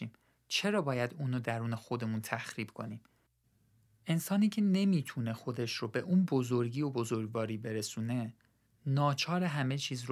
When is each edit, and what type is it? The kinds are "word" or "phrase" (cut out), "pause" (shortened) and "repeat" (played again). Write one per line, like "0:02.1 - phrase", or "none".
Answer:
none